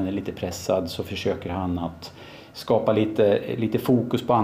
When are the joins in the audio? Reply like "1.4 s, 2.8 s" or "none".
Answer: none